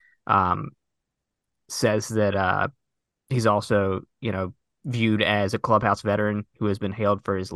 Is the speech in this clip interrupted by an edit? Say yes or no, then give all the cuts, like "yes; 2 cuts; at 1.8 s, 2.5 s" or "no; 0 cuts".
no; 0 cuts